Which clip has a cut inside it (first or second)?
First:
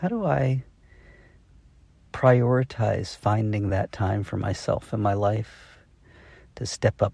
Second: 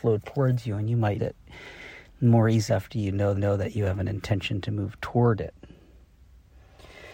second